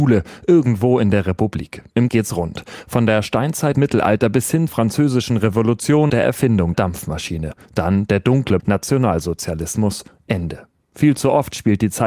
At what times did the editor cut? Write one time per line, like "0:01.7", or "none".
0:02.1
0:03.7
0:04.7
0:06.1
0:06.7
0:08.6